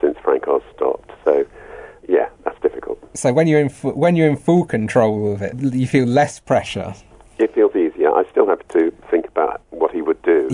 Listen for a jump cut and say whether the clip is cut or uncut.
cut